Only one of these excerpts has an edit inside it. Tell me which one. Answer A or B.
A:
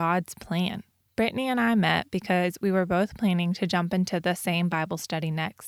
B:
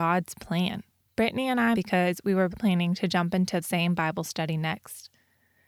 B